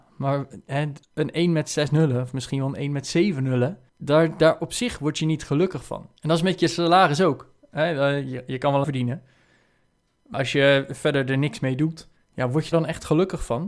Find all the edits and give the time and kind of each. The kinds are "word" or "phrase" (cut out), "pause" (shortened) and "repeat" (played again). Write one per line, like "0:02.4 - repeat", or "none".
0:03.9 - pause
0:06.2 - pause
0:08.8 - phrase
0:10.3 - word
0:12.2 - pause
0:12.7 - word